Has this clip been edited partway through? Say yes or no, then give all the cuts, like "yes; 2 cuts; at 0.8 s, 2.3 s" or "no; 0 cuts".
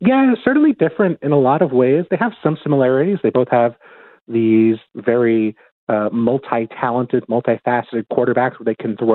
no; 0 cuts